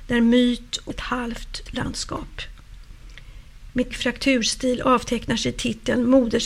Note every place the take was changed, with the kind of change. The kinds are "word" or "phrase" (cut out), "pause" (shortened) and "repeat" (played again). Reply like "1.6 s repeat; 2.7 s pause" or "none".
0.9 s phrase; 1.7 s word; 3.9 s word